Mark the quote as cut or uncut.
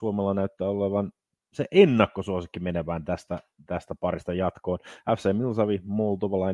uncut